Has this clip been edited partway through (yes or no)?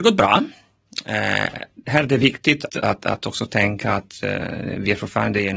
yes